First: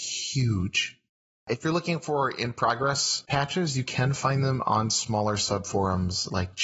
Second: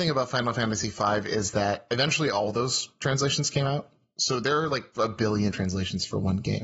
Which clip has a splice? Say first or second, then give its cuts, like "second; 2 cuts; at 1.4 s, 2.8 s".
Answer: second; 1 cut; at 5.5 s